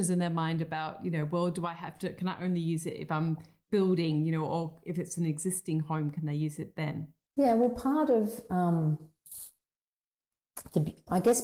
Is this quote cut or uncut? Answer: uncut